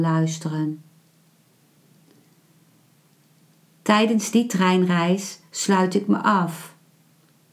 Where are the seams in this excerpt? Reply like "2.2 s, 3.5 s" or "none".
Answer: none